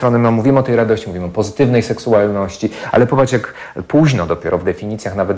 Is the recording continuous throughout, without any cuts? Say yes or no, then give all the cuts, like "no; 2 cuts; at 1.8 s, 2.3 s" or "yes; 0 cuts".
yes; 0 cuts